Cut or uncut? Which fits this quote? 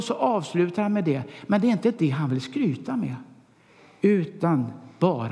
uncut